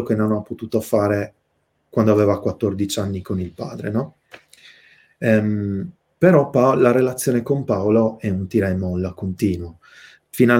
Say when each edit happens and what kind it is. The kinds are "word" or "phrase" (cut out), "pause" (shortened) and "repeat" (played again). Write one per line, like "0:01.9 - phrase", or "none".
none